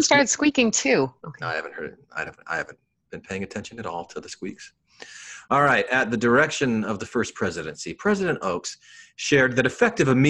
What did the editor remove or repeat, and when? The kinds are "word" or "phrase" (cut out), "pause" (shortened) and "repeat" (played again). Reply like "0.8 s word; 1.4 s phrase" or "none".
none

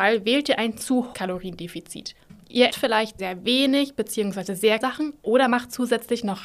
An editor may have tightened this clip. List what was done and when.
1.1 s word; 2.7 s word; 3.2 s word; 4.8 s word

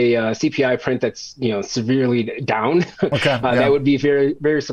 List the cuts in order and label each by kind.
none

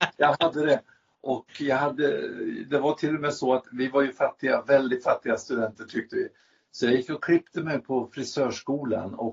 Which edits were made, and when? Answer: none

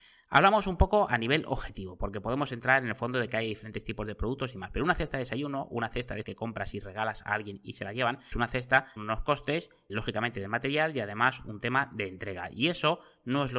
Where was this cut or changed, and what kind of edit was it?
6.2 s word; 8.3 s word; 9.0 s word; 9.9 s word

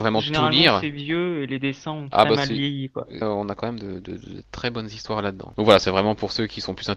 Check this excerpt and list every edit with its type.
3.2 s phrase

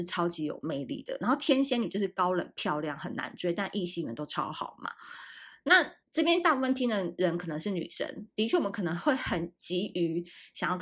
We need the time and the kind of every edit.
6.0 s pause

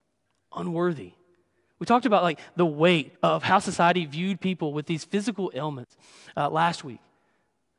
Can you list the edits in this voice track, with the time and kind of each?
3.2 s pause

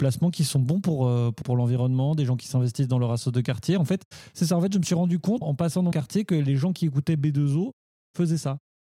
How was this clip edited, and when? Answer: 1.4 s phrase; 5.4 s word; 5.9 s word

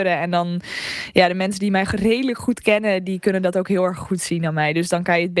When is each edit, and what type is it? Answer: none

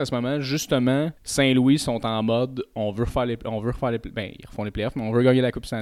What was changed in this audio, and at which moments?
1.2 s pause

